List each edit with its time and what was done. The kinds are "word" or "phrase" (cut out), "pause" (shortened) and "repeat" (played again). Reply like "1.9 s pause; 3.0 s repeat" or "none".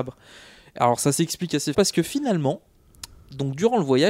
1.7 s word